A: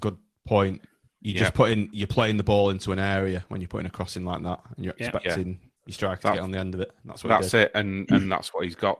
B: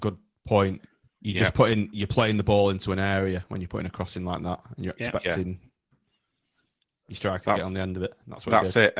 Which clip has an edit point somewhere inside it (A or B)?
A